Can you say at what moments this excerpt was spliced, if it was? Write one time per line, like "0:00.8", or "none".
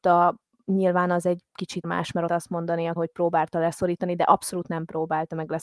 0:01.8
0:02.3
0:03.0